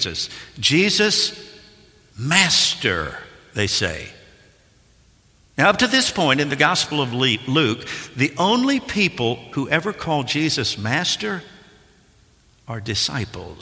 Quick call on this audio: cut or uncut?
uncut